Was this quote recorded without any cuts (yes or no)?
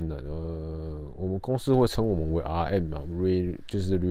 yes